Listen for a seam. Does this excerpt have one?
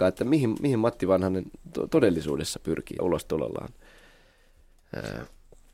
yes; 1 cut; at 3.0 s

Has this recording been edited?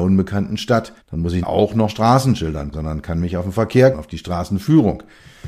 yes; 5 cuts; at 1.0 s, 1.4 s, 1.9 s, 2.7 s, 3.9 s

